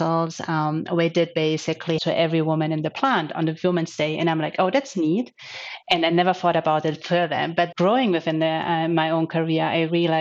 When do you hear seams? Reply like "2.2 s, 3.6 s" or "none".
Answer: 2.0 s, 7.7 s